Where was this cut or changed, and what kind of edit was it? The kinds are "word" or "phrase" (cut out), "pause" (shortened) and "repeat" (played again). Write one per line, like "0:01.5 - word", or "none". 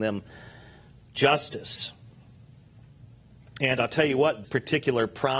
0:04.4 - word